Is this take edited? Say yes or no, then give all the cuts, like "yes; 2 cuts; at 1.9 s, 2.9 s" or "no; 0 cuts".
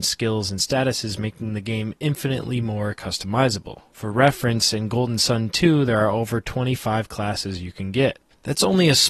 no; 0 cuts